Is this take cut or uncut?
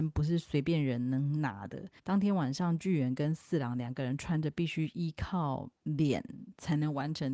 cut